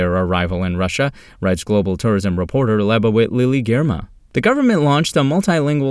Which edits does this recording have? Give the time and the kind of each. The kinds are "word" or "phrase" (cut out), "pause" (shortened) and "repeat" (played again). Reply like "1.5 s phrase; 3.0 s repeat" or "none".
none